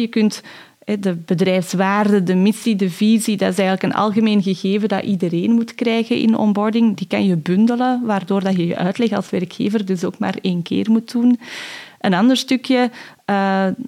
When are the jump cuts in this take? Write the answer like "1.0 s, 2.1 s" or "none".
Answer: none